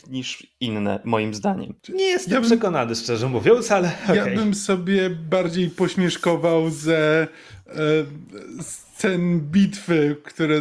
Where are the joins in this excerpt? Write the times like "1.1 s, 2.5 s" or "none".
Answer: 1.8 s